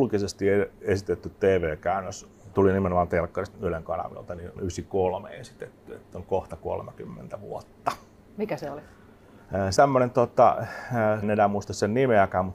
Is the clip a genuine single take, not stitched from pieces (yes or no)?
no